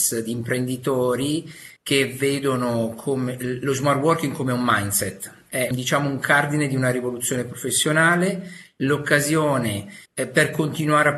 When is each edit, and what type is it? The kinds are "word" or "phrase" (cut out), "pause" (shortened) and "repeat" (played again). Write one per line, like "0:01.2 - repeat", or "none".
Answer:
0:01.8 - pause
0:05.7 - word
0:10.0 - pause